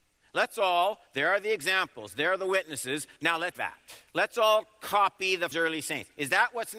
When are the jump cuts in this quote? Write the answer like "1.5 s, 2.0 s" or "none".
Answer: 1.1 s, 3.2 s, 3.5 s, 4.1 s, 5.5 s